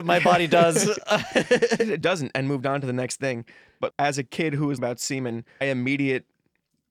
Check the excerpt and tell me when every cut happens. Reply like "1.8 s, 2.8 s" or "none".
2.0 s, 3.9 s, 4.8 s, 5.6 s

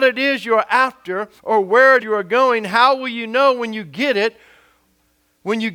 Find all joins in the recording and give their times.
1.4 s, 2.0 s

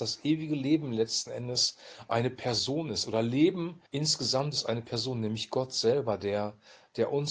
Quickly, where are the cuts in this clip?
3.9 s

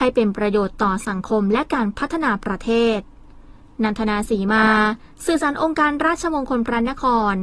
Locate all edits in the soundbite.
none

